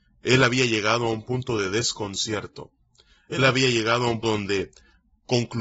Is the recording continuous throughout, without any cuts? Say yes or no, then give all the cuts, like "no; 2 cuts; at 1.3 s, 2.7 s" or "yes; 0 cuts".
no; 1 cut; at 4.2 s